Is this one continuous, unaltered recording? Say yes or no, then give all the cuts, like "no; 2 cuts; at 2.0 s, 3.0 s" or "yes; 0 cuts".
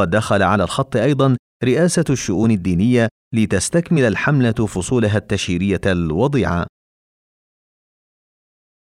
yes; 0 cuts